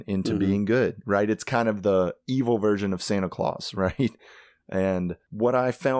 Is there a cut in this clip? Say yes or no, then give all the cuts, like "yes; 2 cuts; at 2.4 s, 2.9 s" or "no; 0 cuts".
no; 0 cuts